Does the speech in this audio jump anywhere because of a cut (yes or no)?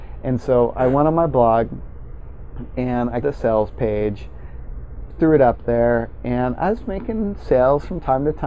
yes